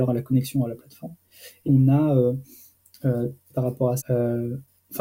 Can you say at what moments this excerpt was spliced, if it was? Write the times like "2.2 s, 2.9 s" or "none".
1.7 s, 3.5 s, 4.0 s